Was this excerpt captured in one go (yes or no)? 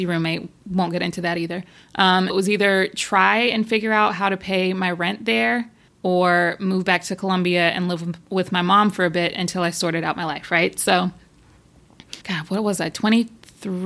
no